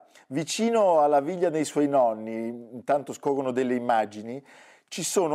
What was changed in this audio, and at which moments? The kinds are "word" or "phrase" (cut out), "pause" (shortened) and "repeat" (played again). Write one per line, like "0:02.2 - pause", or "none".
none